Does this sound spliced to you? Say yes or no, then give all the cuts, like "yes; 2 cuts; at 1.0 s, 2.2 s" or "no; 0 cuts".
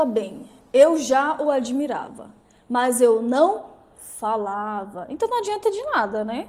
no; 0 cuts